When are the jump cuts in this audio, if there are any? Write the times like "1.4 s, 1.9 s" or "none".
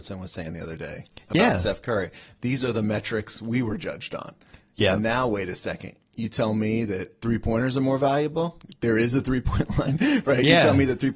none